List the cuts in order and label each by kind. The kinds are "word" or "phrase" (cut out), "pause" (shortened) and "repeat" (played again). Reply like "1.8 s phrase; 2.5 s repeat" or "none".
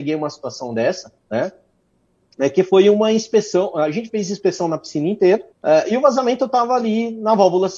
1.2 s pause; 5.5 s pause